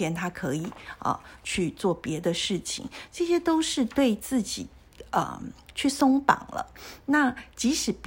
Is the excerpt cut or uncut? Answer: uncut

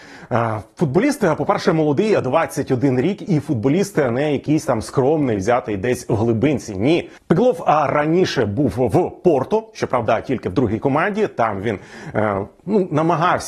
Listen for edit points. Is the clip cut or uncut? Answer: uncut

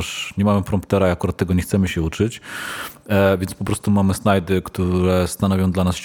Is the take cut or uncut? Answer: uncut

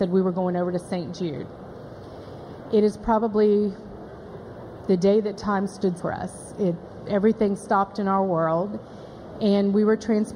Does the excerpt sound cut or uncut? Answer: cut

